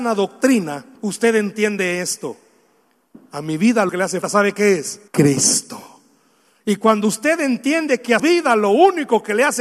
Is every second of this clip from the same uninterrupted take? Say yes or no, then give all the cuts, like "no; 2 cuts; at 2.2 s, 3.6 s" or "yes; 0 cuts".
no; 6 cuts; at 1.0 s, 3.3 s, 3.9 s, 4.2 s, 5.1 s, 8.2 s